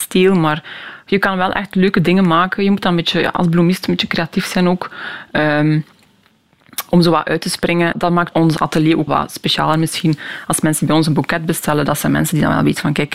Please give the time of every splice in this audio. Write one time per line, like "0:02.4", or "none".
0:07.9
0:08.3
0:09.1